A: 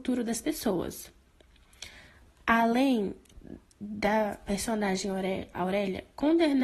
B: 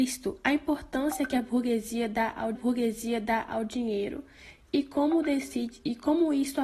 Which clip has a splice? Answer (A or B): B